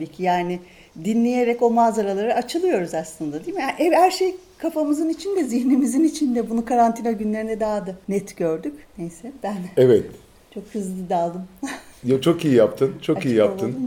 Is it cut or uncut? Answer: uncut